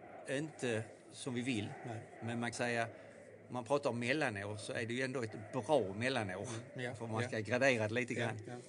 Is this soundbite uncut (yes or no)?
no